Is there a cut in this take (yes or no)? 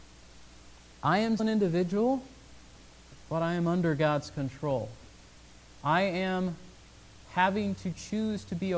yes